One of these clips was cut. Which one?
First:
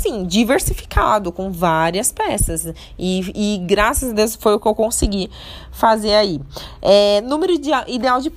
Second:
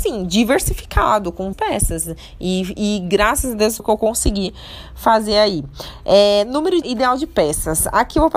second; 3 cuts; at 1.5 s, 3.8 s, 6.8 s

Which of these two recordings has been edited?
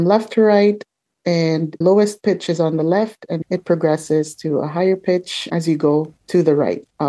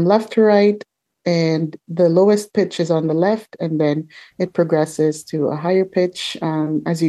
first; 4 cuts; at 1.8 s, 3.4 s, 5.5 s, 6.2 s

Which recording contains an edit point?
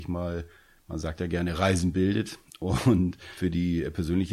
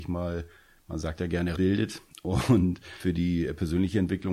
second; 1 cut; at 1.6 s

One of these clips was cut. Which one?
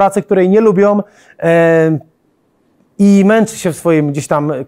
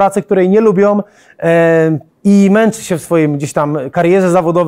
second; 1 cut; at 2.1 s

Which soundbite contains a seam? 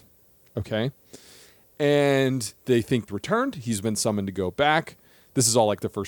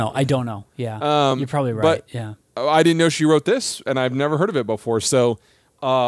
first; 2 cuts; at 2.6 s, 3.1 s

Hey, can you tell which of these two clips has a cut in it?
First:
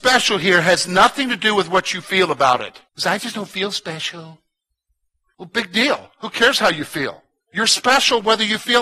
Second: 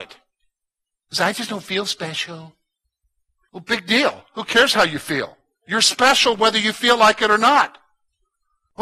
first; 1 cut; at 2.9 s

